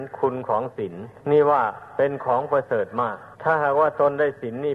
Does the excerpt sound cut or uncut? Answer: cut